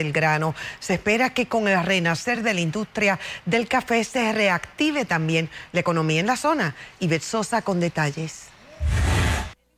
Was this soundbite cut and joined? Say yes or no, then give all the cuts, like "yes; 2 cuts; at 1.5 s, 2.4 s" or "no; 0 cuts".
no; 0 cuts